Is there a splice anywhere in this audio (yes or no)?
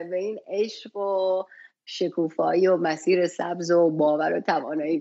no